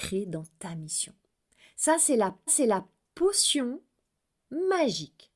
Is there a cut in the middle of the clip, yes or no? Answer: yes